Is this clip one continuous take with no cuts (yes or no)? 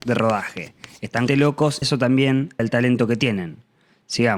no